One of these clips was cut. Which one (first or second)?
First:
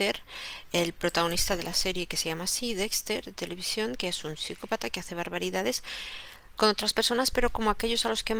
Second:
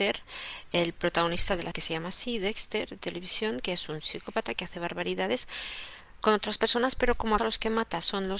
second